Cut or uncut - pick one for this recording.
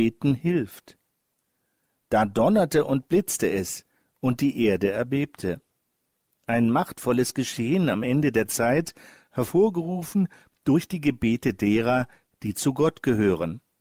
uncut